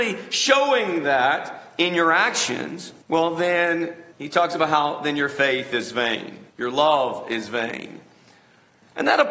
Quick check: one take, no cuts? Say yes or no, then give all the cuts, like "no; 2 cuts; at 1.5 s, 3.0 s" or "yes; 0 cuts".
no; 3 cuts; at 3.0 s, 4.1 s, 6.5 s